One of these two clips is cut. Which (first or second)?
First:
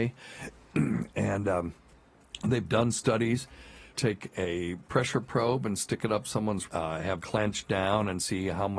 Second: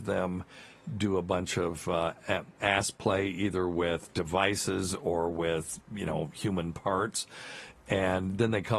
first